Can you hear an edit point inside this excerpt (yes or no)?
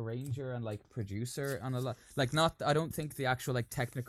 no